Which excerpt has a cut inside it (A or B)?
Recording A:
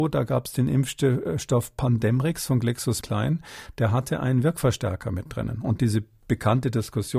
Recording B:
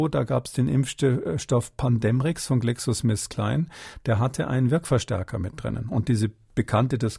A